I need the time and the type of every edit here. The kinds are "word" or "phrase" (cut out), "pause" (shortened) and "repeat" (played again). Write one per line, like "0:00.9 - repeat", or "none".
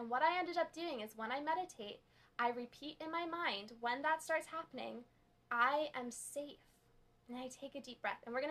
none